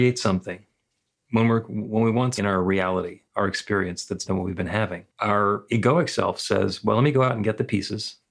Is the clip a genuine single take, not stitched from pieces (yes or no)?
no